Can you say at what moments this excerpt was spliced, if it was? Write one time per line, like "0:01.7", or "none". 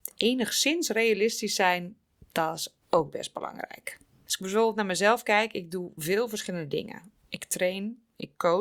0:02.8